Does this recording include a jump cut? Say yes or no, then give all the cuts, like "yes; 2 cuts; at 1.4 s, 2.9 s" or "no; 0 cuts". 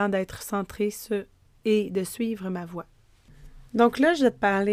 no; 0 cuts